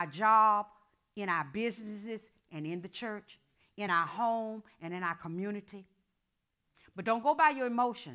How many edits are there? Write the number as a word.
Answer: zero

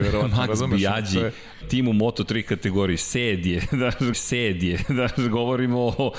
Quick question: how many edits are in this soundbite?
two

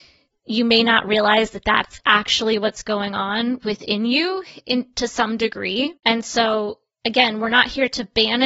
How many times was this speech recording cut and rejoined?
one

